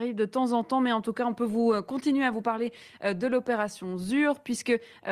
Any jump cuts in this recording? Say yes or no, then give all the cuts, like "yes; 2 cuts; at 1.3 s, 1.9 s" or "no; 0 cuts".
no; 0 cuts